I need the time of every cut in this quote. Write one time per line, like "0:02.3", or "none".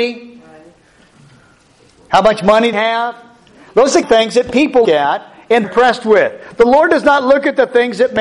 0:02.7
0:04.0
0:04.8
0:05.6